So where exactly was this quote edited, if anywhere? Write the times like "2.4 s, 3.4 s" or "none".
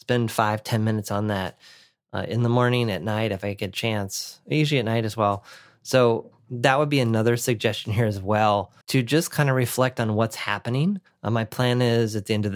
8.8 s, 11.1 s